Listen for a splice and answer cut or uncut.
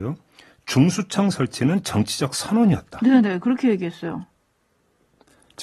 uncut